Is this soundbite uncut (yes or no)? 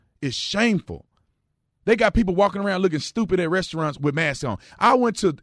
yes